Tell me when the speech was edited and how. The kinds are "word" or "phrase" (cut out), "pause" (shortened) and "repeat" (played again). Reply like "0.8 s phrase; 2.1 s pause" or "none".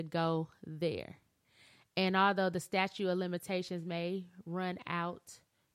none

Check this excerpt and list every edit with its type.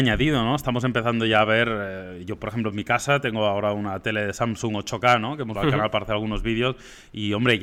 5.6 s phrase

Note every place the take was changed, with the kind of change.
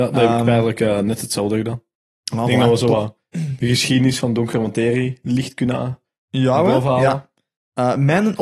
none

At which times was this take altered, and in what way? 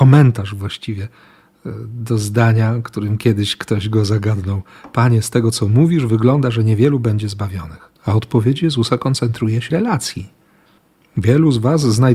8.0 s pause; 9.7 s phrase

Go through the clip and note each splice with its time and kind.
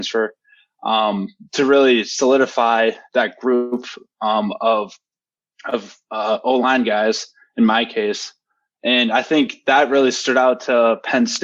none

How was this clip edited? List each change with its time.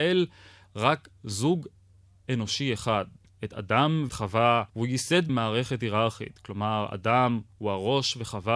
4.1 s word; 4.7 s pause; 5.3 s word

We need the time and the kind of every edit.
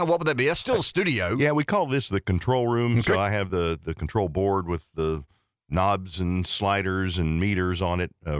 none

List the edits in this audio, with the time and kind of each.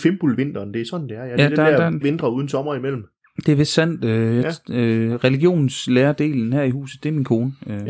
2.0 s word

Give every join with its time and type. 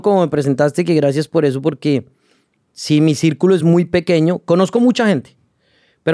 none

